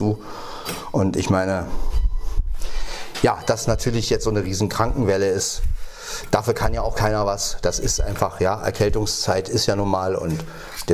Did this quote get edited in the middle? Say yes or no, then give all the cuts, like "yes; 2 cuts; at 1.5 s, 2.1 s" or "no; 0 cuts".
no; 0 cuts